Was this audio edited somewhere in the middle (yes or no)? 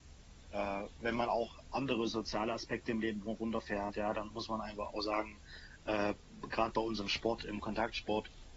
no